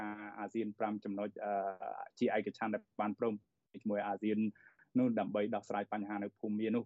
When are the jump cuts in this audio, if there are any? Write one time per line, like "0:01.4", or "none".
none